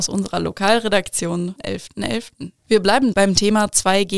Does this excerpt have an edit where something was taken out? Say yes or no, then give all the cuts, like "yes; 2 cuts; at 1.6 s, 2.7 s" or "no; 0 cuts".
yes; 3 cuts; at 1.6 s, 2.6 s, 3.1 s